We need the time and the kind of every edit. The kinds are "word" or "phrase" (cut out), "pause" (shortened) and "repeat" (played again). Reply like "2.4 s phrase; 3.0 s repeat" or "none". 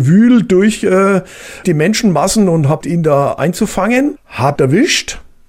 1.6 s word; 2.8 s word; 4.6 s phrase